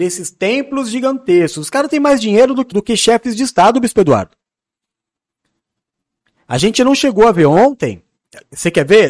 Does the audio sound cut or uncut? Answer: cut